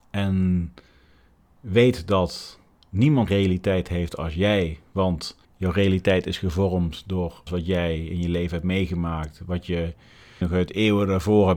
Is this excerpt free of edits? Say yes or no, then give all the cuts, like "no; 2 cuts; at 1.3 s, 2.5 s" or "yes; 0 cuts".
no; 4 cuts; at 3.3 s, 5.4 s, 7.5 s, 10.4 s